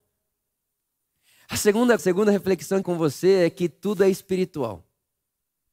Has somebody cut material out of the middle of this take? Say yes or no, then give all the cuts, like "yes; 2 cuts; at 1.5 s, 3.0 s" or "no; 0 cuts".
yes; 2 cuts; at 2.0 s, 2.8 s